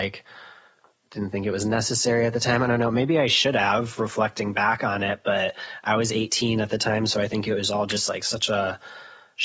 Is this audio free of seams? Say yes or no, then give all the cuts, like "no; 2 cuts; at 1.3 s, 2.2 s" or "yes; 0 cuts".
yes; 0 cuts